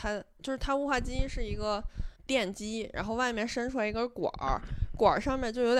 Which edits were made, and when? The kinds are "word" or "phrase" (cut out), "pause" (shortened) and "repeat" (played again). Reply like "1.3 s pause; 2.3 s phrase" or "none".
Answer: 2.2 s pause